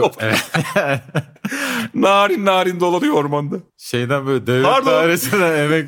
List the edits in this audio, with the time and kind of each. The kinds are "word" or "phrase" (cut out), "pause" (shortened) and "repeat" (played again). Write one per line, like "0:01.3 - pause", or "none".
0:03.7 - pause